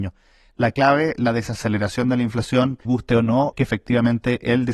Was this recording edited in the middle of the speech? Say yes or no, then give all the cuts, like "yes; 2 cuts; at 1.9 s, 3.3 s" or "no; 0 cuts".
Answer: yes; 3 cuts; at 1.2 s, 2.8 s, 3.5 s